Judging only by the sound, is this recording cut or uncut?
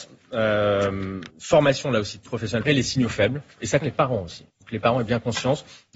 cut